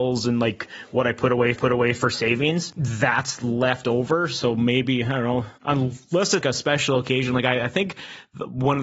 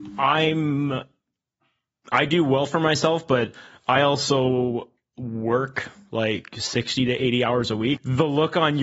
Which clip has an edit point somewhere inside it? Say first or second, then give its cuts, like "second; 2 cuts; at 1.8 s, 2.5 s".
first; 3 cuts; at 1.5 s, 5.6 s, 6.4 s